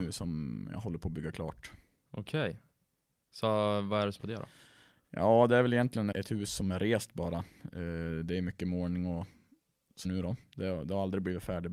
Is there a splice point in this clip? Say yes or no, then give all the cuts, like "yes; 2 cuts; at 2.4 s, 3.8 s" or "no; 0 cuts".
yes; 3 cuts; at 4.2 s, 6.1 s, 10.0 s